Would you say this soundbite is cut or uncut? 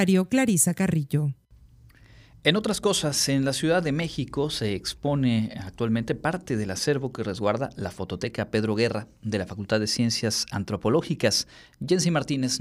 uncut